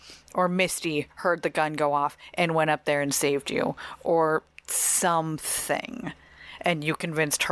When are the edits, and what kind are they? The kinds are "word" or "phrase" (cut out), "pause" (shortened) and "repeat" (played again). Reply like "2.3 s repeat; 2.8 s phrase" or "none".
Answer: none